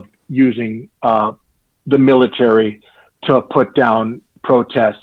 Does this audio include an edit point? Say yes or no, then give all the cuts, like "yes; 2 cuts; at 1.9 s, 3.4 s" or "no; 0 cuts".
no; 0 cuts